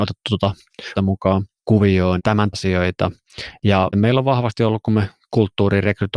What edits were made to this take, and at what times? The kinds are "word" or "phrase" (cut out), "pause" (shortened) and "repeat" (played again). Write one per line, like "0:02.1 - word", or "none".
0:01.0 - word
0:02.2 - word
0:02.5 - word
0:03.9 - word